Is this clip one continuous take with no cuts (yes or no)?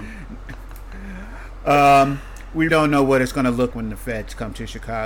no